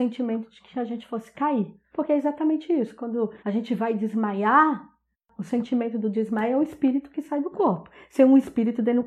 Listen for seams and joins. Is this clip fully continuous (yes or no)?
no